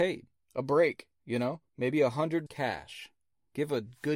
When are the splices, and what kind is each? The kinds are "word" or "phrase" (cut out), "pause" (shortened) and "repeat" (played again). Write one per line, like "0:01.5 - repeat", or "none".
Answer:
0:01.7 - pause
0:02.5 - word